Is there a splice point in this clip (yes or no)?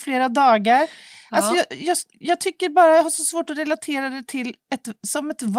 no